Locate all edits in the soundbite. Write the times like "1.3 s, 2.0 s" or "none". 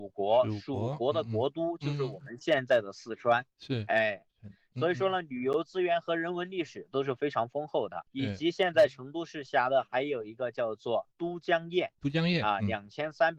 8.1 s, 12.0 s